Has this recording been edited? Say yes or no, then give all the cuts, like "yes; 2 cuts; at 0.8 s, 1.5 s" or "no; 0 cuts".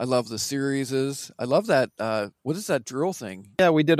yes; 1 cut; at 2.4 s